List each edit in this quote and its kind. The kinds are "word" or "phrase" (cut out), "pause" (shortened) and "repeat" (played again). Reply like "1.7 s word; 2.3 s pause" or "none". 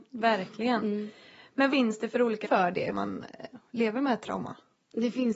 1.7 s word; 2.4 s word; 2.9 s word